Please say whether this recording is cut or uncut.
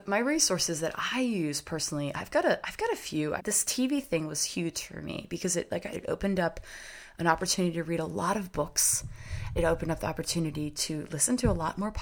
cut